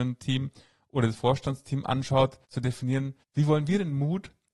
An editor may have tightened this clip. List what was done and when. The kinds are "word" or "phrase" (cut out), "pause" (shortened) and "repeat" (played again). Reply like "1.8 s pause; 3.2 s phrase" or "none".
2.4 s pause; 3.2 s pause